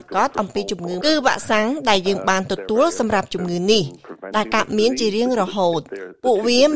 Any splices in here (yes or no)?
yes